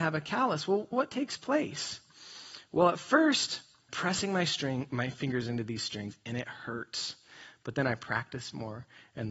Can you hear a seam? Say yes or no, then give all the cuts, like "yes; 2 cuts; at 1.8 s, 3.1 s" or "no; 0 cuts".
yes; 2 cuts; at 0.9 s, 3.9 s